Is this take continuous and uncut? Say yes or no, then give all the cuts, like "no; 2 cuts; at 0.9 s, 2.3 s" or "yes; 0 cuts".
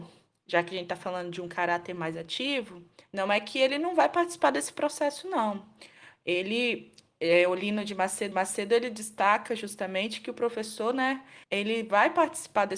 no; 3 cuts; at 3.0 s, 8.3 s, 11.4 s